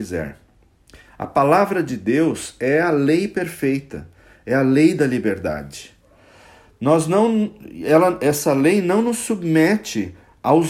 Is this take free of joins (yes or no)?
yes